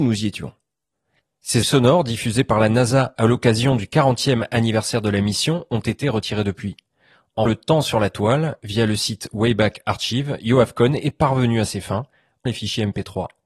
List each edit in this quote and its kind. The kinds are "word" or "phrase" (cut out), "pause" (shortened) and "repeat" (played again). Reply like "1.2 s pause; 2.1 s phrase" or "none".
1.6 s word; 7.5 s word; 12.5 s word